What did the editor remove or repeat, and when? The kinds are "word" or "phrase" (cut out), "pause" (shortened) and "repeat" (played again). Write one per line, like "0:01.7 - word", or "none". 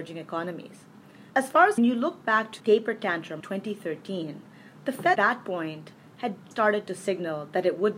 0:01.3 - pause
0:01.8 - phrase
0:02.6 - word
0:03.4 - word
0:05.1 - word
0:06.5 - word